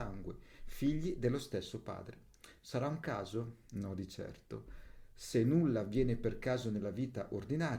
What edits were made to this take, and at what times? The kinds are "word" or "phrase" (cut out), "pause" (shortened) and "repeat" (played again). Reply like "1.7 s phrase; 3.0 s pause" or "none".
none

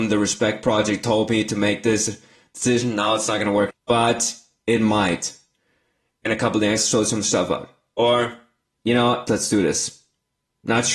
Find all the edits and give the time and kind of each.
3.7 s word; 6.8 s word; 9.3 s word

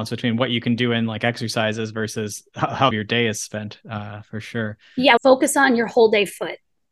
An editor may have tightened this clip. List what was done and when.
2.9 s phrase; 5.2 s phrase

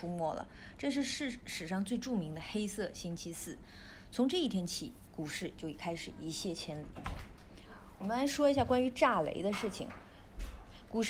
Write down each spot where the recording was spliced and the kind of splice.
none

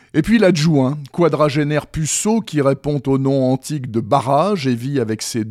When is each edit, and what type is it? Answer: none

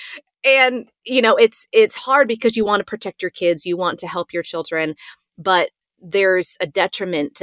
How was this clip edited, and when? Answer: none

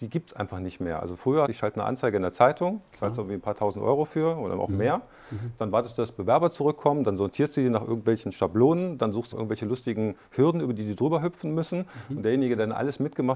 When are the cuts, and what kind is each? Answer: 1.5 s phrase; 9.3 s phrase

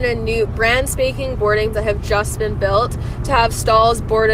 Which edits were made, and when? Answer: 1.3 s word; 1.7 s word

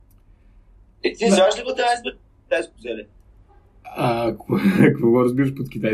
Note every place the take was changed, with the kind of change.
none

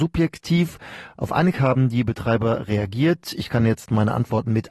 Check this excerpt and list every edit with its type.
1.5 s word

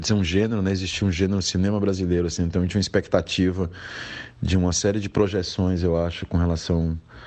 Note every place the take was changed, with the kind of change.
none

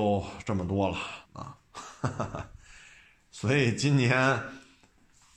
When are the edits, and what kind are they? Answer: 1.2 s pause

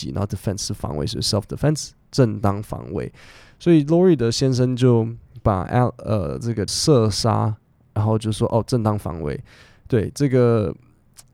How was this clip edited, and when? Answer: 6.7 s word

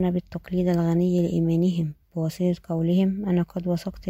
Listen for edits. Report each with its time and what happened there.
2.0 s pause

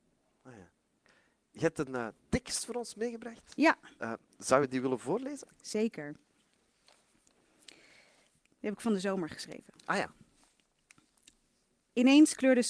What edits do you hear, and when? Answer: none

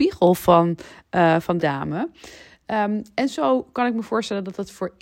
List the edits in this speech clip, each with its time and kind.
1.6 s word

